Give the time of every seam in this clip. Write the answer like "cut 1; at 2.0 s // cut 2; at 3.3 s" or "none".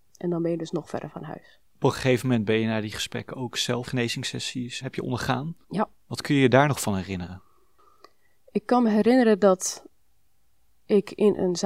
cut 1; at 1.7 s // cut 2; at 3.9 s // cut 3; at 4.8 s // cut 4; at 5.6 s